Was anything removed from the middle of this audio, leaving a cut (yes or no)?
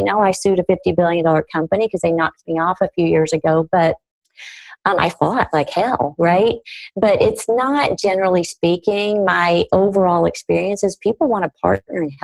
no